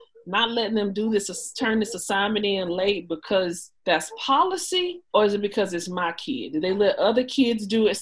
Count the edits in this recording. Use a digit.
2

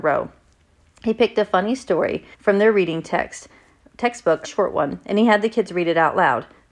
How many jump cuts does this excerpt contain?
3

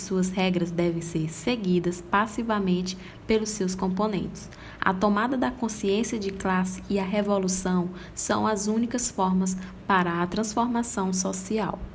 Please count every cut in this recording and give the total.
0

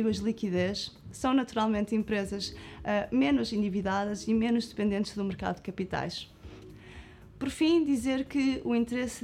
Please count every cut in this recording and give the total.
0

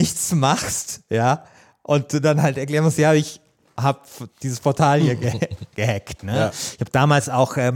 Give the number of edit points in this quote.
0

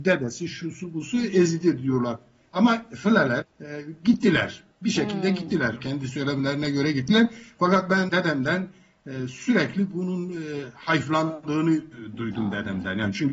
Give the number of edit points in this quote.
4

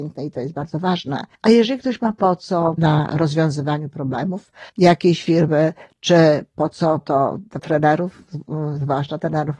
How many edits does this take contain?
5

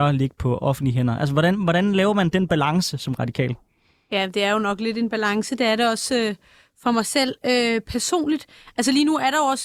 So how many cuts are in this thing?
0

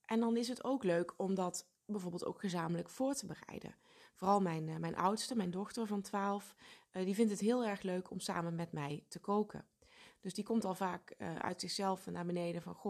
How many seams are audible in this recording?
1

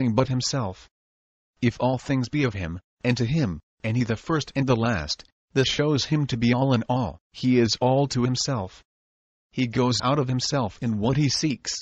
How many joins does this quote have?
2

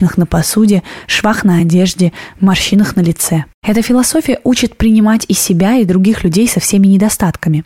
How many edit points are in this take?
0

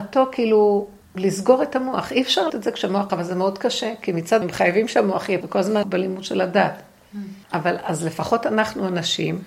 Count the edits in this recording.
7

